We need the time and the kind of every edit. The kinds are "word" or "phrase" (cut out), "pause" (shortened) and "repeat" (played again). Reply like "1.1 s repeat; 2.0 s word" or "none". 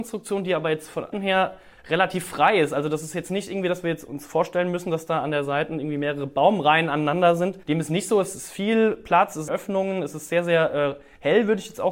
1.1 s phrase; 7.6 s pause; 9.5 s phrase